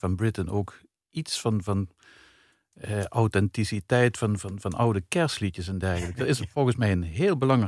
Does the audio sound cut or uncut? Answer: uncut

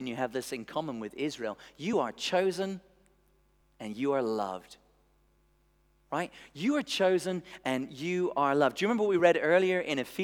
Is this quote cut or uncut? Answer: uncut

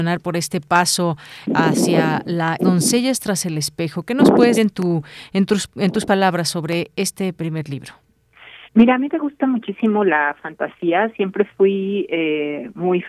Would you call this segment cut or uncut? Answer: cut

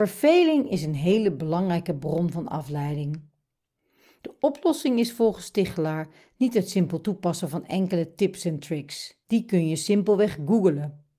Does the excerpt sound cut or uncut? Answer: uncut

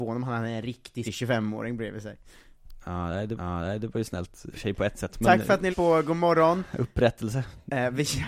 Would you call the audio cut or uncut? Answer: cut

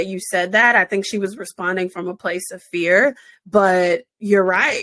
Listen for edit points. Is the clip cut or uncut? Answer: uncut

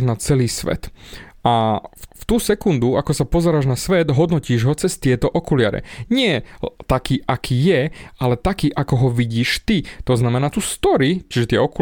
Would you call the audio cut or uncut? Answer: cut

